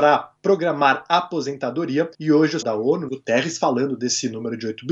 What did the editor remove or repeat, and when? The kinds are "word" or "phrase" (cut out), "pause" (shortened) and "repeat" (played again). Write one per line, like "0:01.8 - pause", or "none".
0:02.1 - pause
0:02.6 - word
0:03.1 - phrase